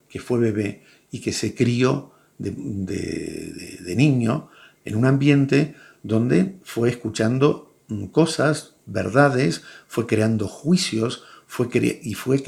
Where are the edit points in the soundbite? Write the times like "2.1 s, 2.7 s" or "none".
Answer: none

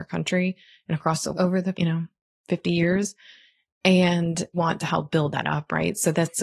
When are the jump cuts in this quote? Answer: 1.3 s, 1.7 s, 4.5 s

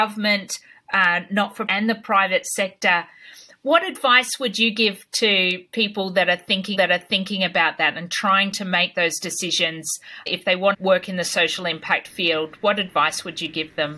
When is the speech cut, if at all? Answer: 1.7 s, 6.8 s, 10.7 s

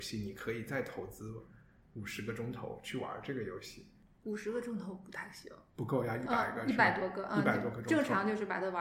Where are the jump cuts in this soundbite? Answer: none

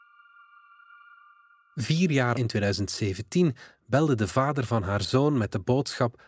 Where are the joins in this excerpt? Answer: 2.3 s

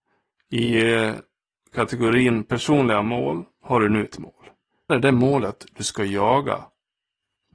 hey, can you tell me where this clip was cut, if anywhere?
4.1 s, 4.9 s

